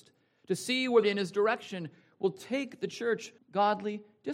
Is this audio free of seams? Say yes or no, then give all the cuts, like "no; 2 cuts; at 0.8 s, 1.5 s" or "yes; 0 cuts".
no; 2 cuts; at 1.0 s, 3.4 s